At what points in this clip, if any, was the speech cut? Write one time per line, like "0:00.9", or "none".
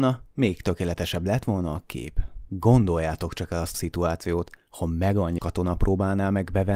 0:02.5
0:03.7
0:05.4